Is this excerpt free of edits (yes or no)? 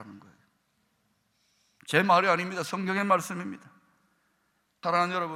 yes